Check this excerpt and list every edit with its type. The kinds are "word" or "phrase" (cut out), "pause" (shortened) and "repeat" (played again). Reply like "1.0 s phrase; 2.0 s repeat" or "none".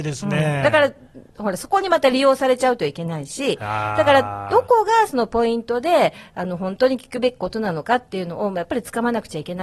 1.3 s pause